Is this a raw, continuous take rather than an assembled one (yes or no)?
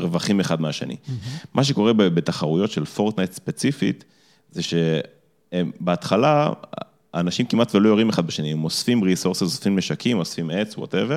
yes